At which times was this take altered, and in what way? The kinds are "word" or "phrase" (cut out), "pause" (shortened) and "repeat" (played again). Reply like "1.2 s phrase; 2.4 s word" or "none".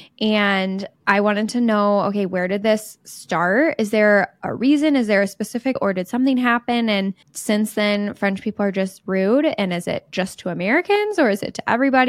1.0 s pause; 5.8 s word; 7.2 s pause